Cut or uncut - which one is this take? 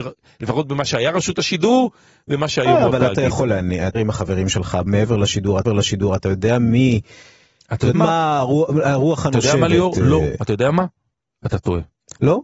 cut